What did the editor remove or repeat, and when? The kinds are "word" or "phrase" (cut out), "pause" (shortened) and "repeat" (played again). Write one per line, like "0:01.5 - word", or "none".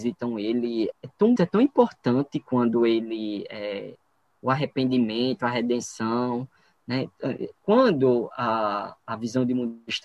0:00.9 - word
0:01.4 - word